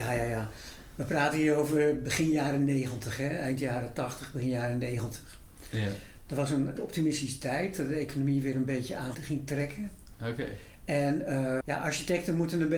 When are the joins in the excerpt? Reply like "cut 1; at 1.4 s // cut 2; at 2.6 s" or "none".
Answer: cut 1; at 6.8 s // cut 2; at 9.1 s // cut 3; at 11.6 s